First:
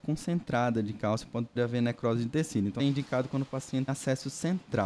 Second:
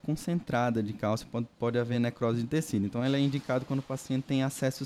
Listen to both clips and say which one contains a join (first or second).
first